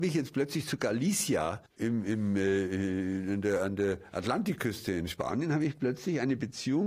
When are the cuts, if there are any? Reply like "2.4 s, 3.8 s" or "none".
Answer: 1.7 s